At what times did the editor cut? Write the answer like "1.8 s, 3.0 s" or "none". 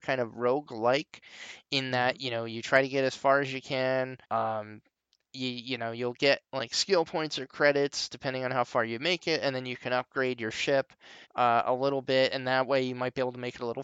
4.2 s, 6.5 s, 11.2 s